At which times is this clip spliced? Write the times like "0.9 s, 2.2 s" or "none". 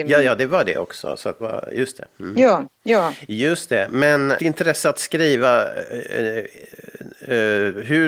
1.4 s, 4.4 s